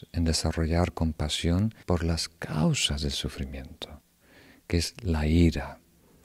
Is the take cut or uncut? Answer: cut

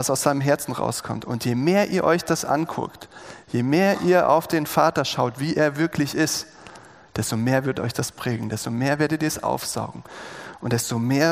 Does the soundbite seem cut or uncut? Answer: uncut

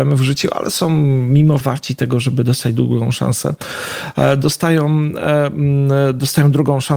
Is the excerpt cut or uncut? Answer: cut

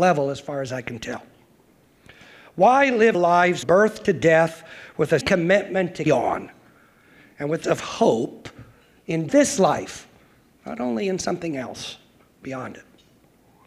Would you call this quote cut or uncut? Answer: cut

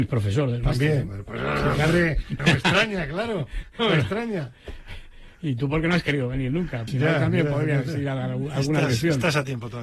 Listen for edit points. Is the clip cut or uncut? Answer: cut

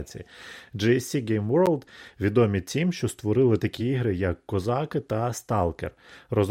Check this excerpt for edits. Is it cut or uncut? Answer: uncut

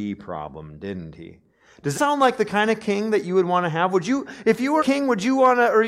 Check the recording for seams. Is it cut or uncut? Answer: cut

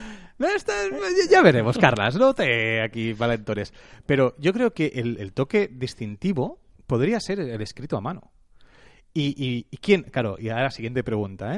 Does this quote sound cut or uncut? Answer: uncut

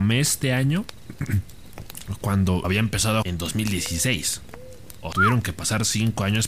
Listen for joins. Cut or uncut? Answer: cut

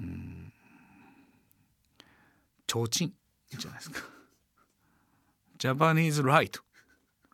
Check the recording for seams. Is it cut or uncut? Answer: uncut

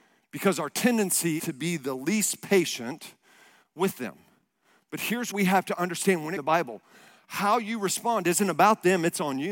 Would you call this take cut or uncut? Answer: cut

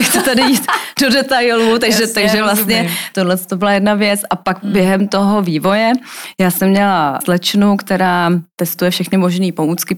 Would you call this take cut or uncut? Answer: uncut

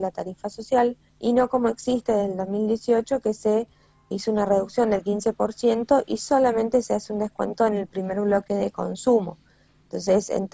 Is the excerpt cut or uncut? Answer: cut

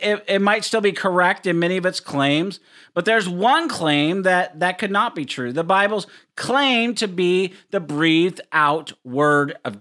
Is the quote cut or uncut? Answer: uncut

